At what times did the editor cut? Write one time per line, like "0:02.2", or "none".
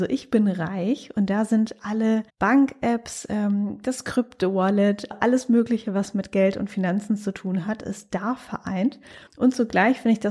0:02.3
0:05.1
0:09.3

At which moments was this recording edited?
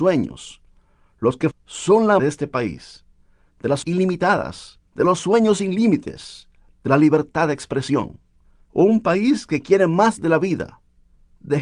0:01.5
0:02.2
0:03.8
0:04.9

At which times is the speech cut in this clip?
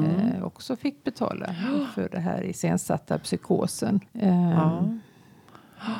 0:04.1

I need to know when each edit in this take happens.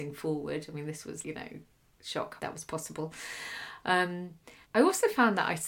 0:01.2
0:02.4
0:04.6

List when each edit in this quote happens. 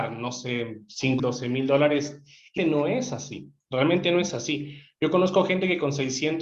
0:01.2
0:02.6

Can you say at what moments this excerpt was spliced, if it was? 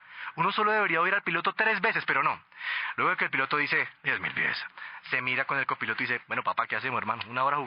none

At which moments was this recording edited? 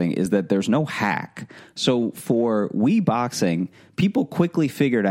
none

